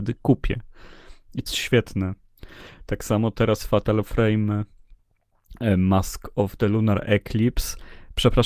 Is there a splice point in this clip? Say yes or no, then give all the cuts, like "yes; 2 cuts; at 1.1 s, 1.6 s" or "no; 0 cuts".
yes; 1 cut; at 1.5 s